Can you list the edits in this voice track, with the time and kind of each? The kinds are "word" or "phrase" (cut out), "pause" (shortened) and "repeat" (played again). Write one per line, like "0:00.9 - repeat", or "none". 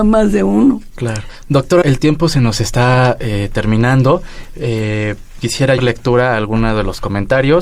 0:01.8 - word
0:05.8 - phrase